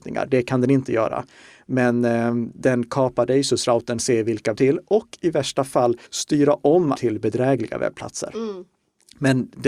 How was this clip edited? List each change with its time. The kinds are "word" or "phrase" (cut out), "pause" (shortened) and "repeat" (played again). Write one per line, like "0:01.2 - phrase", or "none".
0:04.0 - phrase
0:04.5 - phrase
0:06.1 - pause
0:06.9 - word